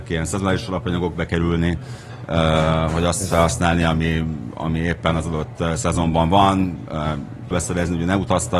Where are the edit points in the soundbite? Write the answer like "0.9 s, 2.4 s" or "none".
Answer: 7.5 s

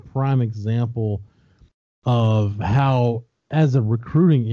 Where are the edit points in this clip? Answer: none

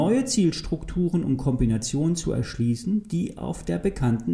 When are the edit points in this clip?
none

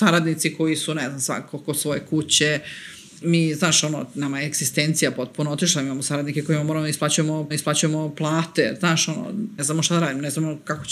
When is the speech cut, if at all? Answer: 3.2 s, 7.5 s, 9.6 s

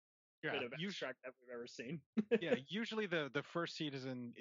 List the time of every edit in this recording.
none

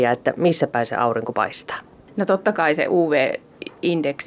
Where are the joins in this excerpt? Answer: none

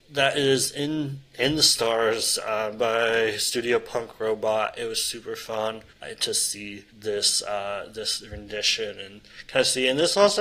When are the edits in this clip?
5.9 s, 6.9 s

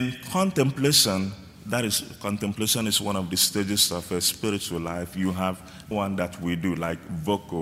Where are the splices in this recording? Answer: 5.9 s

